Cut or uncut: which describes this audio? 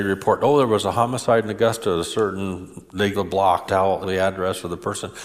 cut